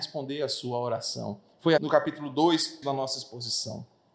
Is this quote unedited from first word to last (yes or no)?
no